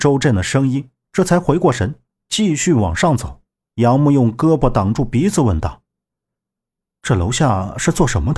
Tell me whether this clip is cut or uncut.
cut